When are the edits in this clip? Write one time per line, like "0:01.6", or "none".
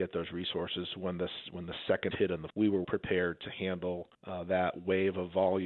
0:02.1
0:02.5
0:02.8
0:04.1